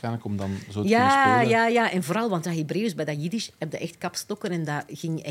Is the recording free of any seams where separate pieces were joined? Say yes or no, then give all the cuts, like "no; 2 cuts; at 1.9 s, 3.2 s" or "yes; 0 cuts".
yes; 0 cuts